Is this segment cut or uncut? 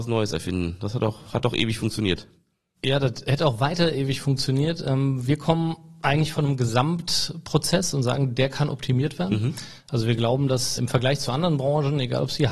cut